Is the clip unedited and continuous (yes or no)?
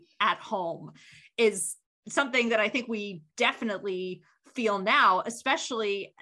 yes